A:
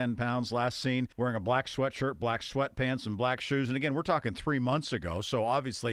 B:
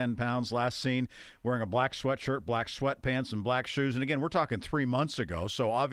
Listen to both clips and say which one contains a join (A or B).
A